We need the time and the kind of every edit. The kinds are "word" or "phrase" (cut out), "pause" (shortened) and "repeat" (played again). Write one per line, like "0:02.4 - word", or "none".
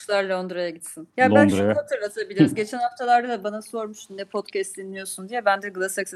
0:01.1 - pause